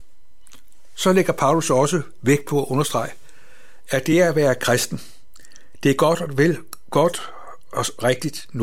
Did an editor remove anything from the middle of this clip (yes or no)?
no